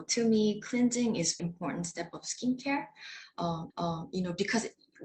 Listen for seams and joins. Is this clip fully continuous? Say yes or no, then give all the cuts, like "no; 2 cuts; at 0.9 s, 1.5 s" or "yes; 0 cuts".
no; 2 cuts; at 1.4 s, 3.7 s